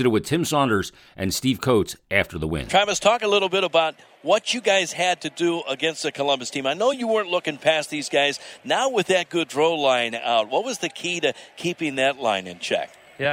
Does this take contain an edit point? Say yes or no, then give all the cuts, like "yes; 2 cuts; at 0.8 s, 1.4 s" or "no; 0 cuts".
no; 0 cuts